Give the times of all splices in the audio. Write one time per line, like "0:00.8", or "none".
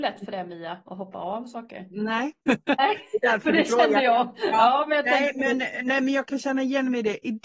0:02.4

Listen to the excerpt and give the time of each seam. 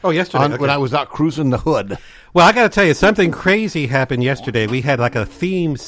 none

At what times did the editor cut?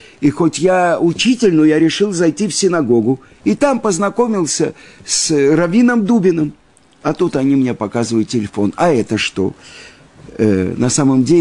none

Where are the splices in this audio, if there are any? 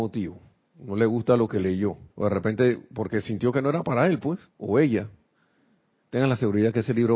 0:02.1
0:04.5

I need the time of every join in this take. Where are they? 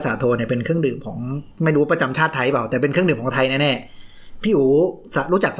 0:01.5

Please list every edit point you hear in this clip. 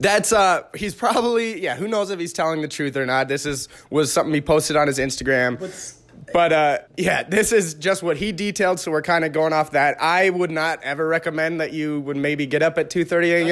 0:06.9

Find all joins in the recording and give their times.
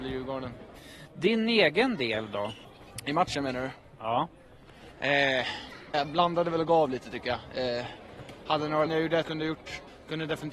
0:05.9
0:08.9
0:09.2

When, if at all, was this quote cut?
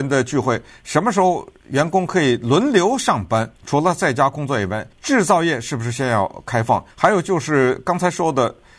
0:03.6
0:04.9
0:06.9

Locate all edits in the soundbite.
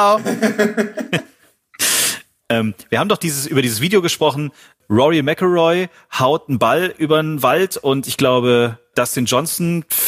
none

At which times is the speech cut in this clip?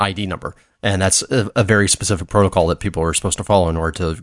none

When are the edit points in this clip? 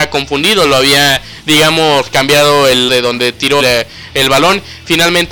0:02.9
0:03.6

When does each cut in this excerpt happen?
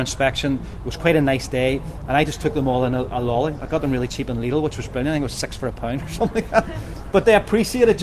none

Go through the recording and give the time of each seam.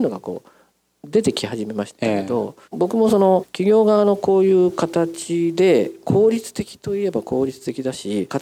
0:02.6

